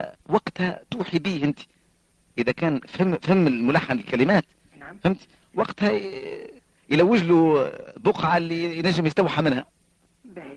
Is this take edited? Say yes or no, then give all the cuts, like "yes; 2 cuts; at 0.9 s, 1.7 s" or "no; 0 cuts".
no; 0 cuts